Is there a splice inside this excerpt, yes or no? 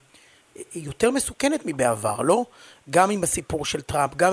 no